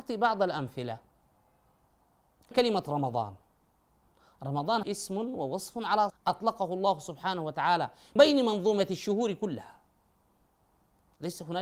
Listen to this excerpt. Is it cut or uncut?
cut